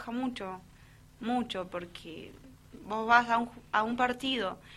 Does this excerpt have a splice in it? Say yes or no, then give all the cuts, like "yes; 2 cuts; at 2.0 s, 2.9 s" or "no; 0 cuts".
no; 0 cuts